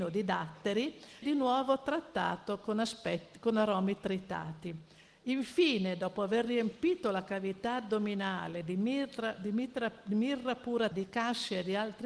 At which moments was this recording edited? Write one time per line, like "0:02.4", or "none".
0:01.2
0:10.9